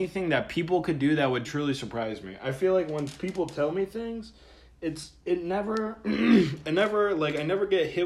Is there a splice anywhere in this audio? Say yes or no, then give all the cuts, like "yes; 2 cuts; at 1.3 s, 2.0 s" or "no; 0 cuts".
yes; 1 cut; at 1.4 s